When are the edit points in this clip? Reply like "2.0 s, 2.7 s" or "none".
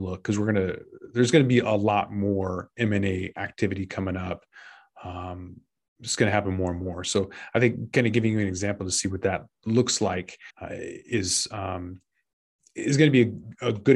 10.5 s